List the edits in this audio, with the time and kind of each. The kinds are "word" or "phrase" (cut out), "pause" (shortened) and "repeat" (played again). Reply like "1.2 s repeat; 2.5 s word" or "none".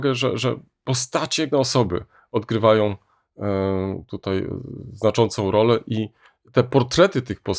1.5 s word